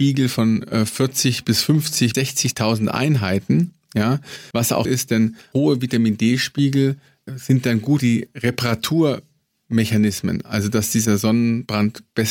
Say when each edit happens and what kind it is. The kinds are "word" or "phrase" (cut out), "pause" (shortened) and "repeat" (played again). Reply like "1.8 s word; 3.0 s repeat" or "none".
2.1 s word; 4.5 s word; 4.8 s word; 5.5 s word; 7.3 s word; 8.0 s word

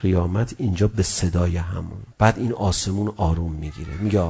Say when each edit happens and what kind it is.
2.1 s pause

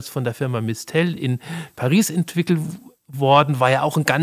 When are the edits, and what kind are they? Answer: none

